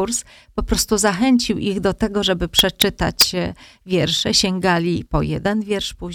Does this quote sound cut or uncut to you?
cut